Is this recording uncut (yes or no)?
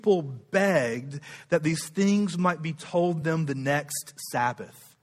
yes